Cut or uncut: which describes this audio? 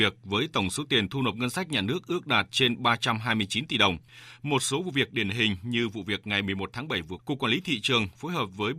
cut